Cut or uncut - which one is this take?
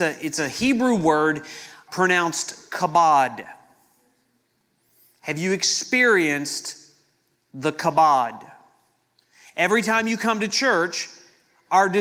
uncut